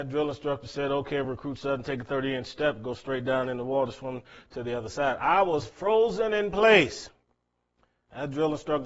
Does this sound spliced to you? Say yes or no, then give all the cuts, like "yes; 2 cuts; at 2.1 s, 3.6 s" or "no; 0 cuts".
no; 0 cuts